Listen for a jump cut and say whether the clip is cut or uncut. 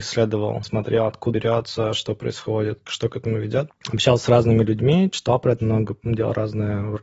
cut